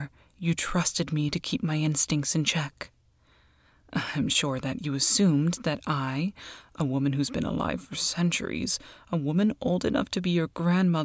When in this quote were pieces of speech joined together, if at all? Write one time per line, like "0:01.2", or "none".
none

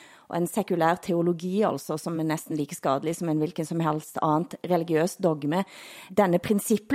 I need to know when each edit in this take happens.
none

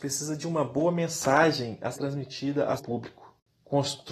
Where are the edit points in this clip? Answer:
0:01.9
0:02.8

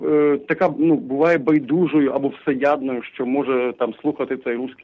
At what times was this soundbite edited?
none

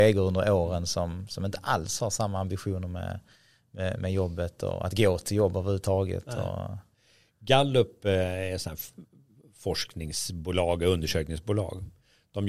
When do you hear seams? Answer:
none

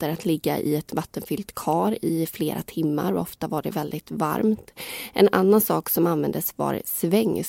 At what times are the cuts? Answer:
none

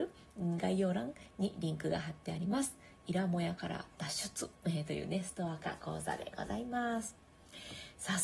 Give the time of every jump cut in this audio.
0:04.5

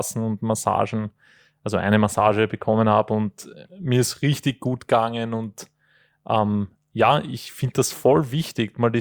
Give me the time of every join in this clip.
none

